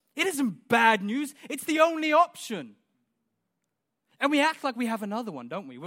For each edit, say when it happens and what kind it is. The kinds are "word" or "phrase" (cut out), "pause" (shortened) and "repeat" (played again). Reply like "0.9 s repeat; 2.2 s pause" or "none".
none